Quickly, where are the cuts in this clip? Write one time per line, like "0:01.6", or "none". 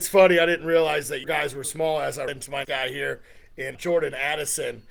0:01.2
0:01.6
0:02.3
0:02.6
0:03.7

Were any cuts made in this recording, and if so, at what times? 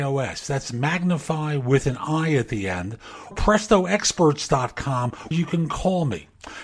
0:03.3
0:05.3

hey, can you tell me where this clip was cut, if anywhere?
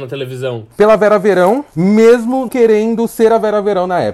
0:02.5

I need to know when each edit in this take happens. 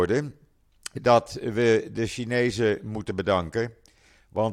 none

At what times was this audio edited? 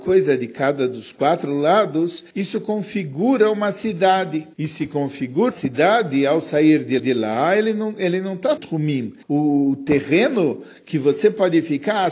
0:02.3
0:04.5
0:05.5
0:07.0
0:08.6
0:09.2

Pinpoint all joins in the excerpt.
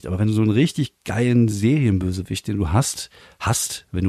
none

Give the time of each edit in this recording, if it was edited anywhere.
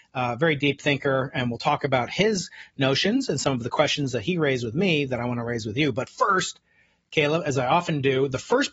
none

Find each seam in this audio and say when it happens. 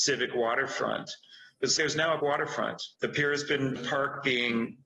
0:01.8
0:02.2
0:02.9
0:03.8

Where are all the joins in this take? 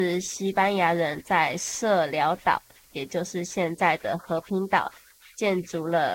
none

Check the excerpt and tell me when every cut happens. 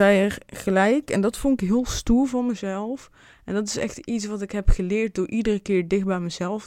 none

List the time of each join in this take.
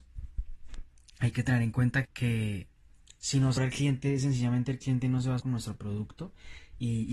0:02.0
0:03.6
0:05.4

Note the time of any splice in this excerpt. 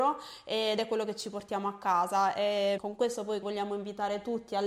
0:02.8
0:03.4

